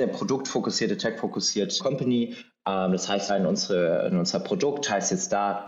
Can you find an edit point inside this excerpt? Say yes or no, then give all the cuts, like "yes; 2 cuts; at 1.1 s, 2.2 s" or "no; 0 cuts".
yes; 2 cuts; at 1.8 s, 3.3 s